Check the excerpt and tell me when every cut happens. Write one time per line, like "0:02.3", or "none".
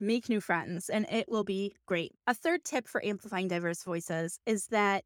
0:02.2